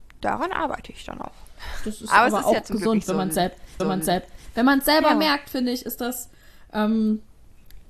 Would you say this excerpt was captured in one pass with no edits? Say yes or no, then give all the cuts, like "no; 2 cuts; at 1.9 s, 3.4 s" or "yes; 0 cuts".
no; 1 cut; at 3.8 s